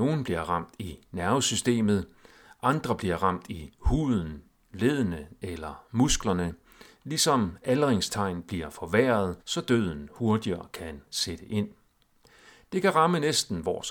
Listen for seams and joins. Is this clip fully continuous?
no; 1 cut; at 9.4 s

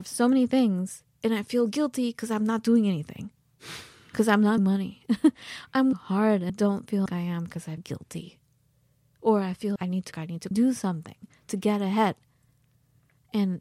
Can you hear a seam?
yes; 8 cuts; at 4.6 s, 5.9 s, 6.5 s, 7.1 s, 7.8 s, 9.8 s, 10.1 s, 10.5 s

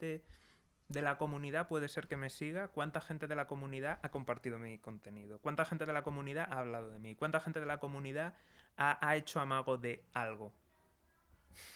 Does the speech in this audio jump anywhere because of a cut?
no; 0 cuts

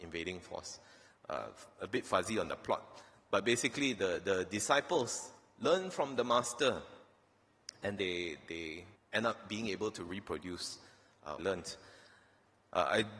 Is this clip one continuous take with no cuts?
no; 3 cuts; at 8.0 s, 9.0 s, 11.4 s

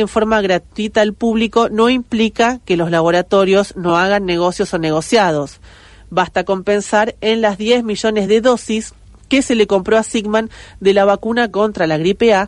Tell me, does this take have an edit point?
no; 0 cuts

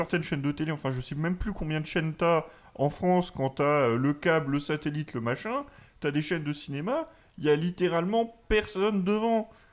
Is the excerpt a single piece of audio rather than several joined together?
yes; 0 cuts

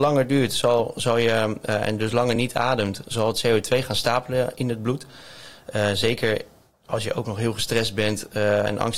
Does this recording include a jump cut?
no; 0 cuts

